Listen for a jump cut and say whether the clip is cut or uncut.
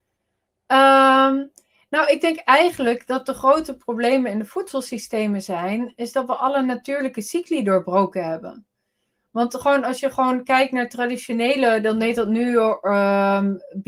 uncut